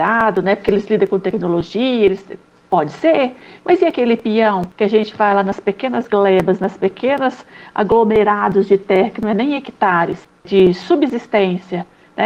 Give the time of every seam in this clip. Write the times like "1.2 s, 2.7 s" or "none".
none